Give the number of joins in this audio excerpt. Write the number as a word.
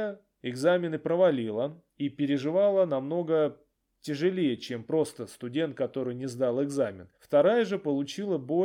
three